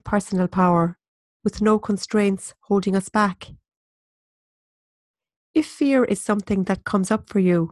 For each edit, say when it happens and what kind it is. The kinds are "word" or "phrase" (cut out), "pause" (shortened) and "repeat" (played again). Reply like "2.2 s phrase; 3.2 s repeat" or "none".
none